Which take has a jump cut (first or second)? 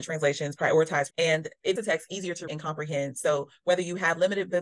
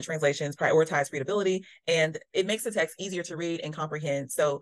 first